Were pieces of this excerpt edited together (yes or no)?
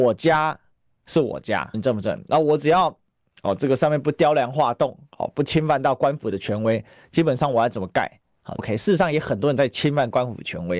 yes